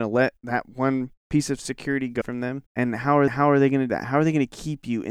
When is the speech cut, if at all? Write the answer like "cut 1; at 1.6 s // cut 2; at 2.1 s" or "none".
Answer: cut 1; at 1.2 s // cut 2; at 2.2 s // cut 3; at 2.7 s // cut 4; at 3.3 s // cut 5; at 3.9 s